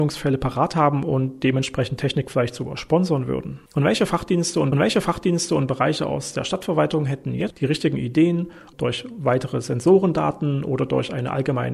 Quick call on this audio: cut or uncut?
cut